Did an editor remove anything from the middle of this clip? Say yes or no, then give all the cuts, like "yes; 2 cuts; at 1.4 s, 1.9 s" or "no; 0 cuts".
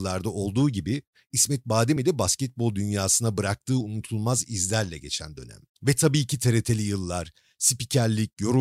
no; 0 cuts